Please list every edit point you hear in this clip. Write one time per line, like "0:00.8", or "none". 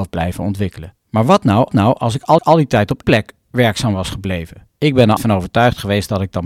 0:01.0
0:01.7
0:02.4
0:03.0
0:04.7
0:05.2